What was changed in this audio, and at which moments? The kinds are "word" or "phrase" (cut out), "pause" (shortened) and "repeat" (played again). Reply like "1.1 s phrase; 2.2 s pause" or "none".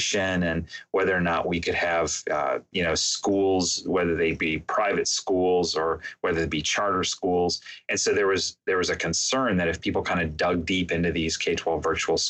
none